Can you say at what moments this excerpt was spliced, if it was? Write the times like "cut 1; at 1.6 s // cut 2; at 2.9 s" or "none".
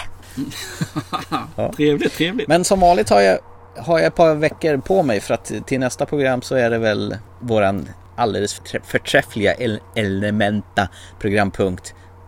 none